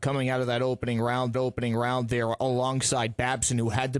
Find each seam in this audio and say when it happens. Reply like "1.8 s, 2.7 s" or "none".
1.3 s